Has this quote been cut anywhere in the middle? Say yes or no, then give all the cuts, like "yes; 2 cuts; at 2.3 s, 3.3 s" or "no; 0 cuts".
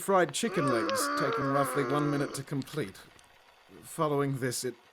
no; 0 cuts